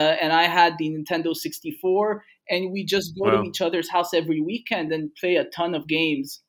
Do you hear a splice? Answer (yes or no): no